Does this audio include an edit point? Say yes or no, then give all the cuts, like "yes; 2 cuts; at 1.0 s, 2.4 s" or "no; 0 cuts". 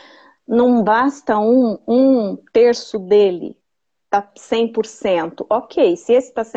no; 0 cuts